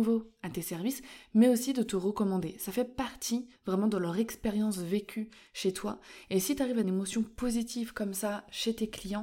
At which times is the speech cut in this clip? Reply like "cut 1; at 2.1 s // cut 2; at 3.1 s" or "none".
cut 1; at 3.6 s // cut 2; at 6.8 s